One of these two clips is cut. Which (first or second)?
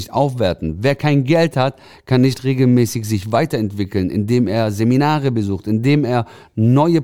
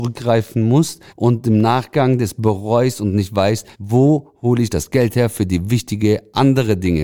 second